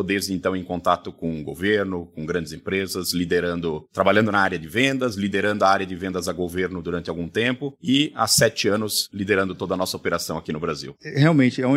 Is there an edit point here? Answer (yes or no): no